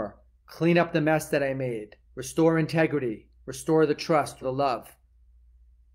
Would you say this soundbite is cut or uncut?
cut